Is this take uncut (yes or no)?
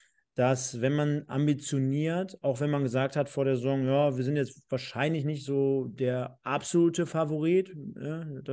yes